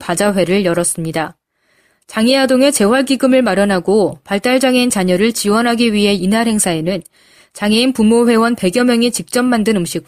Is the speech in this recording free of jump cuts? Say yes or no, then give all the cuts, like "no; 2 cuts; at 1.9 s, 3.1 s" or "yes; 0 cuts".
no; 1 cut; at 6.2 s